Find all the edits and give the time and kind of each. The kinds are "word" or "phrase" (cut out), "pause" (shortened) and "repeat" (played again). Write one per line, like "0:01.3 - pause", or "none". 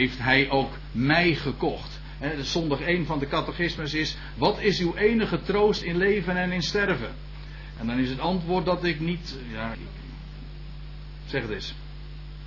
0:09.7 - word